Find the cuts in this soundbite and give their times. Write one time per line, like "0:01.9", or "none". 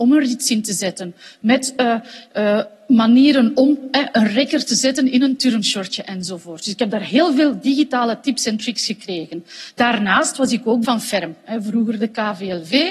0:10.8

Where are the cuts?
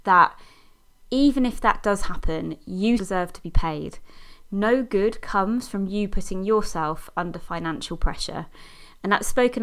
0:03.0

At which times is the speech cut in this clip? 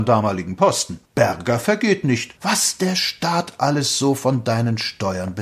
0:01.1
0:02.4

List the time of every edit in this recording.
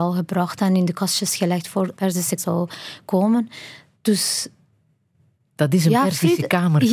0:02.0
0:02.4

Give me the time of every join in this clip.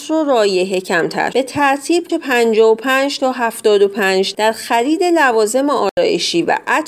0:01.3
0:02.1
0:04.3

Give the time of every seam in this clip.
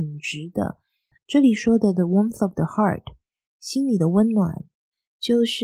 none

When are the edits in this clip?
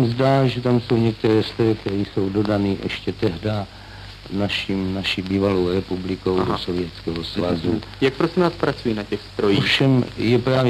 none

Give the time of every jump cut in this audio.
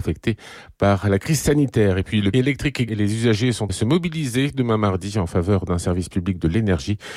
0:02.3
0:02.9
0:03.7

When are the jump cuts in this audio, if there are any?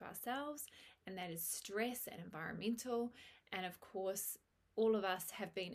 0:04.5

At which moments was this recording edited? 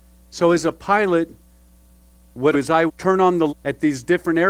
0:02.5
0:02.9
0:03.5

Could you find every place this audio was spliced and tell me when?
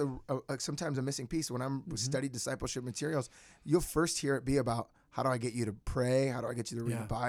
none

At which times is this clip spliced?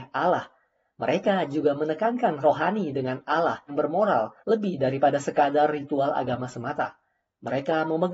0:02.4
0:03.7
0:04.4

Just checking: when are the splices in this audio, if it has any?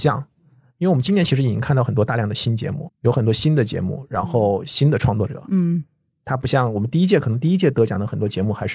0:02.9

